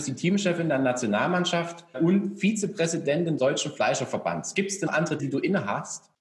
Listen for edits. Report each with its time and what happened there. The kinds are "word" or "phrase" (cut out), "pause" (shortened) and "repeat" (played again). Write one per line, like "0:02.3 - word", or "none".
0:01.9 - word
0:03.4 - word
0:04.9 - word
0:05.2 - word